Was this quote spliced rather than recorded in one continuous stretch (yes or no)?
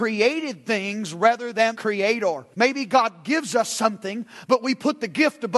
yes